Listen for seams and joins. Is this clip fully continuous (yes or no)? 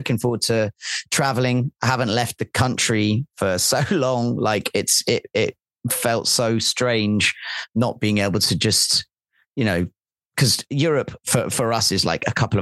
yes